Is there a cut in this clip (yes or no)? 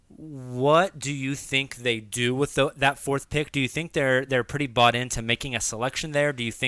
no